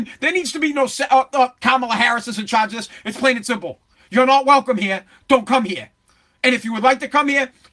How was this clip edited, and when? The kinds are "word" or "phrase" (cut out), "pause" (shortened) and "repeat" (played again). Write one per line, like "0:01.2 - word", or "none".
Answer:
none